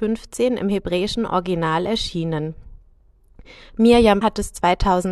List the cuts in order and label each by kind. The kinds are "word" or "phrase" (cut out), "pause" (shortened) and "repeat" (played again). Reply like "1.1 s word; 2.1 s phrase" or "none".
4.2 s word